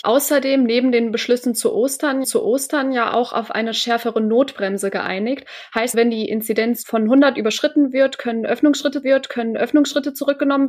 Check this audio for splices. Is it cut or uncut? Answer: cut